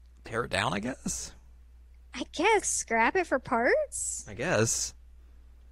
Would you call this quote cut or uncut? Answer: cut